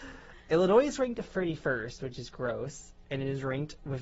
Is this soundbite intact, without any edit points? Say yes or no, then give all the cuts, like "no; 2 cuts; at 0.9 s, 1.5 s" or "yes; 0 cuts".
yes; 0 cuts